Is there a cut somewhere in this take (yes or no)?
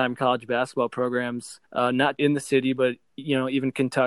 yes